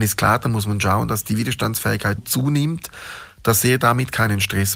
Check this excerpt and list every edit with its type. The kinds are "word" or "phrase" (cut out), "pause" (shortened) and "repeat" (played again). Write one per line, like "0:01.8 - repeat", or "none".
0:02.2 - word